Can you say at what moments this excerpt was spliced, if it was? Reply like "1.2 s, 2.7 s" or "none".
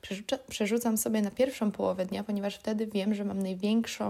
none